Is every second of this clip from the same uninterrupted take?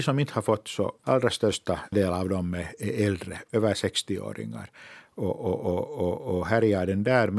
yes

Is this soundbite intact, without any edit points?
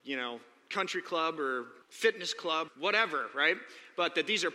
no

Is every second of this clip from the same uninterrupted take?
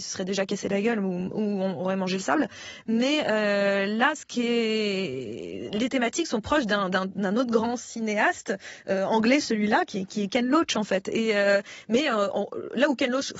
yes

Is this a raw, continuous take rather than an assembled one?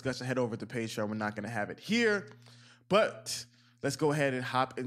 yes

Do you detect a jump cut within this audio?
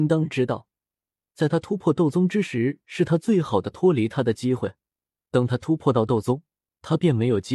no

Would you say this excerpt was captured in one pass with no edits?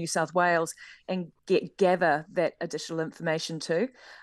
no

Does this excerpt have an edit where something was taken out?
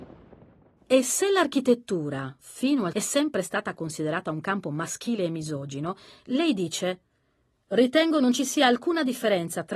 yes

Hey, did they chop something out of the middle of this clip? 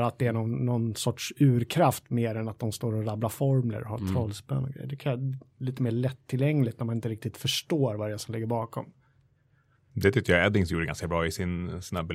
no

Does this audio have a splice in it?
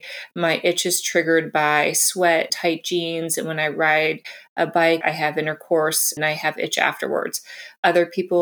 yes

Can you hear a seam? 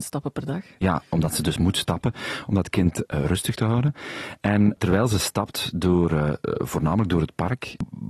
no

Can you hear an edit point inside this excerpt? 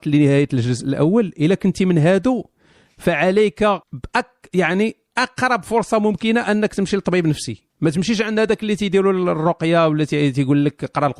yes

